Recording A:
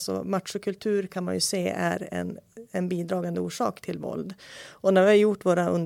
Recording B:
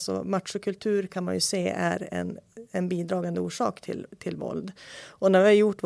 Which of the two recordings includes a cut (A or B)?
A